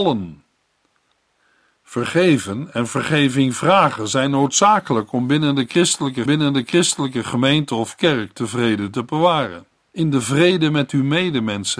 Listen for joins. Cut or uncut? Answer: cut